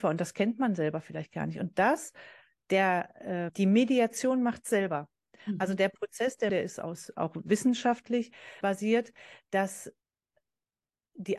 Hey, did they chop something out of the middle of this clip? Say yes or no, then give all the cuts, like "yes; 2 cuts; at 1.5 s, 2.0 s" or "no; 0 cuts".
yes; 4 cuts; at 3.5 s, 6.5 s, 7.5 s, 8.6 s